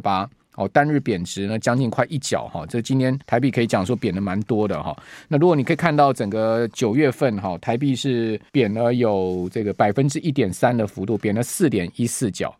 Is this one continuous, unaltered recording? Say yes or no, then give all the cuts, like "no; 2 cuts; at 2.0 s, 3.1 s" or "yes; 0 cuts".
no; 2 cuts; at 3.2 s, 8.5 s